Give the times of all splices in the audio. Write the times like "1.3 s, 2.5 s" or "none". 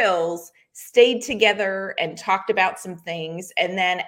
none

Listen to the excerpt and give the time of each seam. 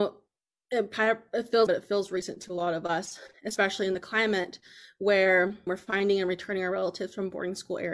1.7 s, 5.7 s

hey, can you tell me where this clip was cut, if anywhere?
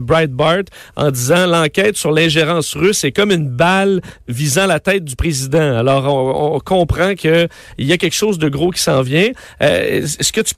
none

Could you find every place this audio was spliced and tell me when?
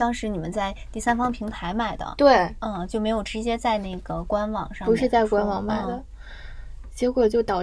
none

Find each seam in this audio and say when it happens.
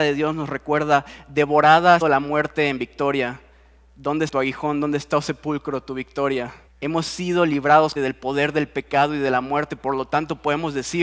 2.0 s, 4.3 s, 6.7 s, 8.0 s

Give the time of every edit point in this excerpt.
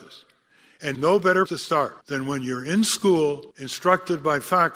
0.9 s, 1.5 s, 2.0 s, 3.5 s

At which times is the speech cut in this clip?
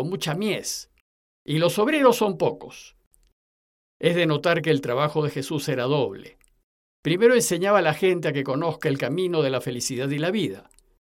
none

